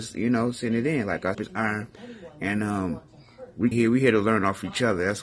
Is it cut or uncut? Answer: cut